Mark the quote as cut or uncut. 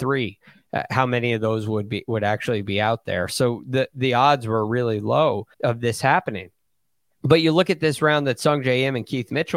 cut